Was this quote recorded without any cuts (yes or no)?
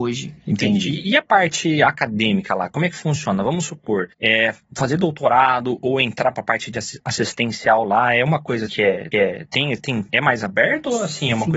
no